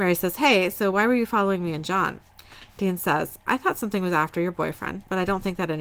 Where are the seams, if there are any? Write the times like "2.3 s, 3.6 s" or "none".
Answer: none